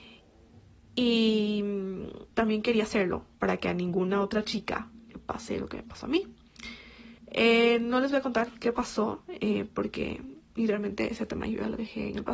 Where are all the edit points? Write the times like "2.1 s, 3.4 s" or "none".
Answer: 2.3 s, 3.3 s, 7.2 s

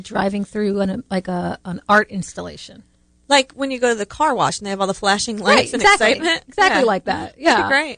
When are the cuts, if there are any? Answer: none

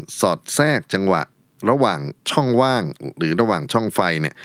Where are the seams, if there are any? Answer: 2.2 s

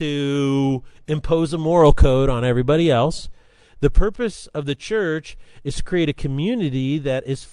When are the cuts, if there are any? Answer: none

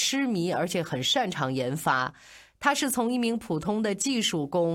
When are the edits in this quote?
none

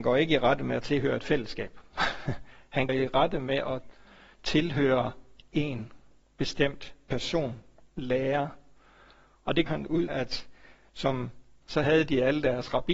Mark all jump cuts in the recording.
2.9 s, 9.7 s, 10.1 s, 11.6 s

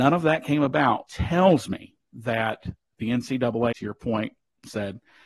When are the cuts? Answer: 1.1 s, 3.7 s

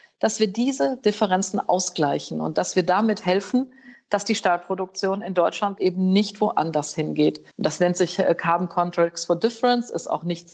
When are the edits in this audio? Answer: 5.8 s, 7.5 s

